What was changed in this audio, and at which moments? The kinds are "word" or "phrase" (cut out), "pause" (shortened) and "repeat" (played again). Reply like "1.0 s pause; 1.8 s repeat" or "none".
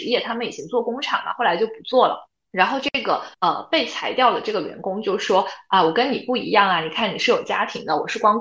2.3 s pause; 3.3 s pause